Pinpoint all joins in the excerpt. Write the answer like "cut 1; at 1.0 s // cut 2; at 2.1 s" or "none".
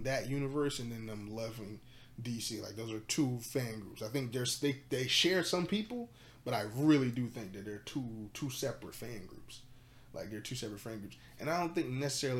none